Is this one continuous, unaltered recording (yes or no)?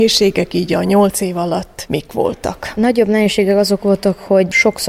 yes